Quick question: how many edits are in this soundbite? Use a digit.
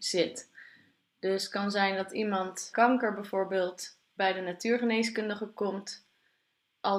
2